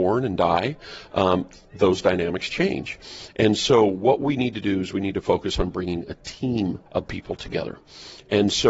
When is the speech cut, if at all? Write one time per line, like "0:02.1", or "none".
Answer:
0:06.9